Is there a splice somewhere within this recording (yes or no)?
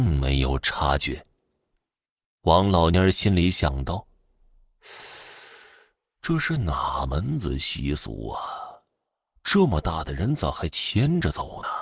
no